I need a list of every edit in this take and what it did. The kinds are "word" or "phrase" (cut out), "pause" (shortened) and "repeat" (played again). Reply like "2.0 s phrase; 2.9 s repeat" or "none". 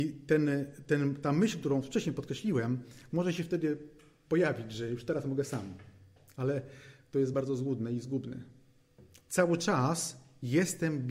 none